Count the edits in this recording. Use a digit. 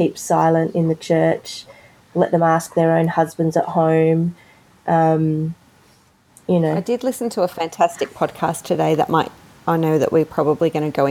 0